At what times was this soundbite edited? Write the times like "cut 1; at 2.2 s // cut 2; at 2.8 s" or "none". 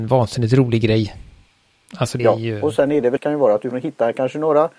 cut 1; at 2.2 s // cut 2; at 3.2 s // cut 3; at 3.7 s